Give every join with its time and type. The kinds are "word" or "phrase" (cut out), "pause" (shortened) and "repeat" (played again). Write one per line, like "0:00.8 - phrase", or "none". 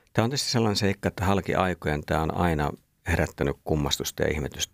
none